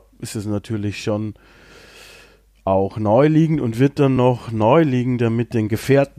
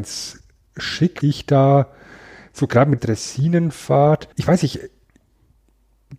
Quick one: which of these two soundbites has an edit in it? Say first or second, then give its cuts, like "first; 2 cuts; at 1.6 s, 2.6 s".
second; 3 cuts; at 1.2 s, 3.0 s, 4.3 s